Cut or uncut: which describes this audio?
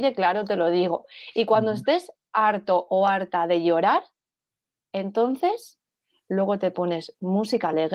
uncut